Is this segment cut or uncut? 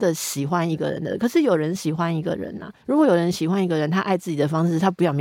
cut